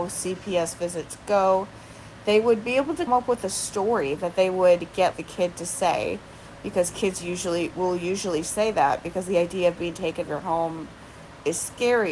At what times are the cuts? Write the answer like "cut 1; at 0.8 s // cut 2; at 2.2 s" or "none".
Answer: cut 1; at 3.1 s // cut 2; at 5.1 s // cut 3; at 10.2 s

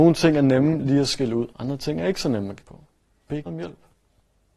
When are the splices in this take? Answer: cut 1; at 1.5 s // cut 2; at 2.6 s // cut 3; at 3.5 s

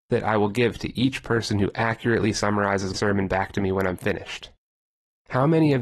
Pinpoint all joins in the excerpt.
cut 1; at 2.9 s

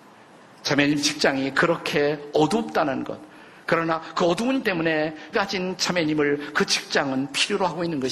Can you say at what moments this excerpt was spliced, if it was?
cut 1; at 4.6 s // cut 2; at 5.3 s

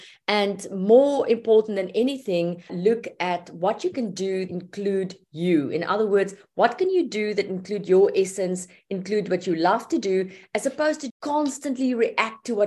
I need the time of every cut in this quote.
cut 1; at 2.7 s // cut 2; at 4.5 s // cut 3; at 11.1 s

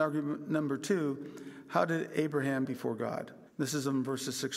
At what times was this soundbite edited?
cut 1; at 2.6 s // cut 2; at 3.5 s

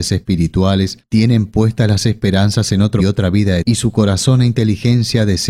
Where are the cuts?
cut 1; at 3.0 s // cut 2; at 3.6 s

